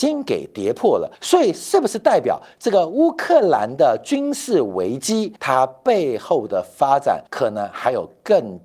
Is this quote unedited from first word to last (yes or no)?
no